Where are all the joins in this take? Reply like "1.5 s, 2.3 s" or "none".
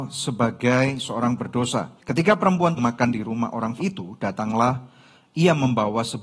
2.0 s, 2.8 s, 3.8 s